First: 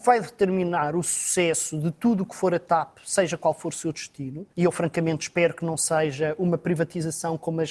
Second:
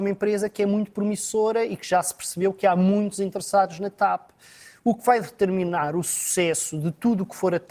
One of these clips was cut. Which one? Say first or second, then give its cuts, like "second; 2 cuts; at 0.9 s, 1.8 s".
first; 1 cut; at 4.5 s